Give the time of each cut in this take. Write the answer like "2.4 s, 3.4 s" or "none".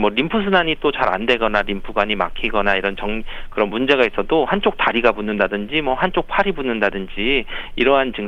none